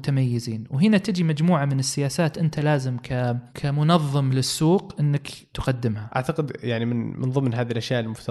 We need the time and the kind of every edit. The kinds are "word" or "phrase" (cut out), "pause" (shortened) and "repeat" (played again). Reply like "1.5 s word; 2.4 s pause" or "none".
none